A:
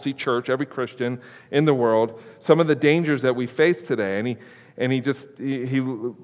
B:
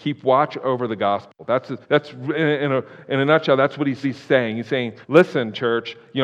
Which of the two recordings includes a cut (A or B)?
B